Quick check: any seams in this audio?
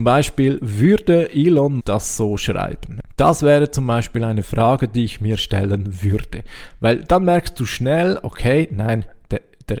yes; 1 cut; at 1.8 s

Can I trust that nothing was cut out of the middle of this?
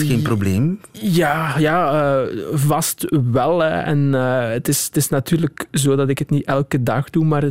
yes; 0 cuts

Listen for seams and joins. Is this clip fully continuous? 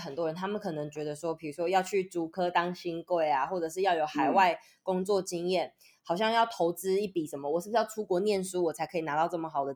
yes; 0 cuts

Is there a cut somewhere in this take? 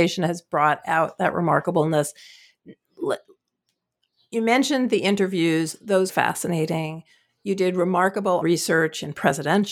yes; 2 cuts; at 6.1 s, 8.4 s

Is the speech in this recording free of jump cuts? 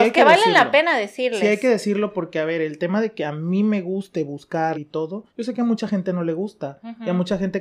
no; 2 cuts; at 4.7 s, 5.3 s

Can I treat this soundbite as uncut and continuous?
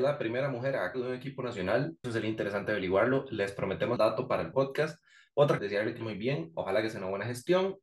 no; 6 cuts; at 0.9 s, 2.0 s, 4.0 s, 4.5 s, 5.6 s, 6.0 s

